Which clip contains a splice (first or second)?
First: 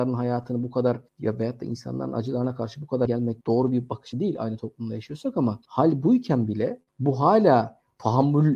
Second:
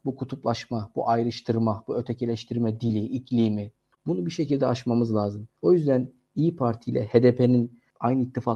first